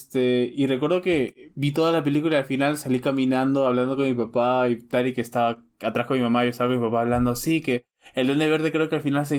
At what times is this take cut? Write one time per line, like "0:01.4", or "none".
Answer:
none